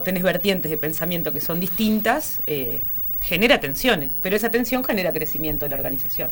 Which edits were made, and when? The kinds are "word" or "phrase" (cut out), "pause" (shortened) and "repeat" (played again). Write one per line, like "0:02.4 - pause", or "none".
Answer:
none